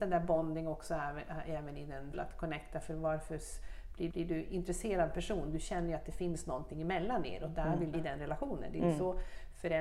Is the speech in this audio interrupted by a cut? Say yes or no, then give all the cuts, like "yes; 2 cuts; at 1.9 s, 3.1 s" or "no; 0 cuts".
yes; 3 cuts; at 2.1 s, 4.1 s, 7.9 s